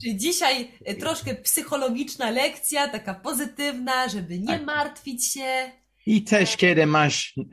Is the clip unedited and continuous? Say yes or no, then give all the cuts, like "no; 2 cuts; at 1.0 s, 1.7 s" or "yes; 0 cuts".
yes; 0 cuts